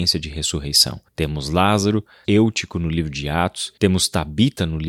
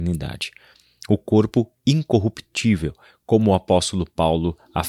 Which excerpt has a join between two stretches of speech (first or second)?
first